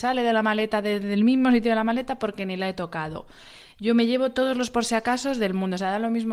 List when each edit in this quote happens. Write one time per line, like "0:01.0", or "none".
none